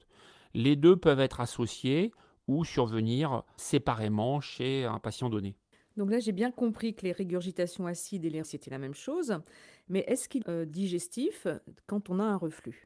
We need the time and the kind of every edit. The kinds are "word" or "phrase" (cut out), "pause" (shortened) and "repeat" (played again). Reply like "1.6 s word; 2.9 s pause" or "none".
3.6 s word; 8.4 s word; 10.4 s phrase